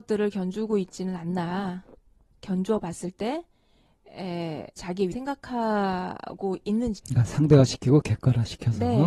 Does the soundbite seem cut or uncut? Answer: cut